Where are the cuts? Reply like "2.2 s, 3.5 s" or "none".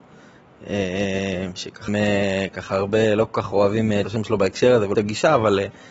1.9 s, 4.0 s, 4.9 s